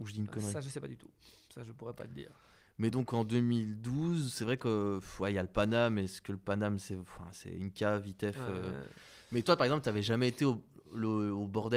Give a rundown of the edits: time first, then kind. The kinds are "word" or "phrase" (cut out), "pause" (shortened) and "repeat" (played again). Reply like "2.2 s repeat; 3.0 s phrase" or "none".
none